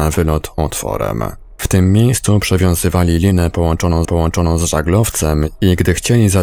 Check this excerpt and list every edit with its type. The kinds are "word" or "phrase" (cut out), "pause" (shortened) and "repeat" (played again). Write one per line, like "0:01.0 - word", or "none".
0:04.0 - repeat